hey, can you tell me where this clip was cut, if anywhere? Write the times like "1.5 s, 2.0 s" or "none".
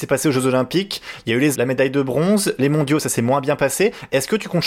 1.5 s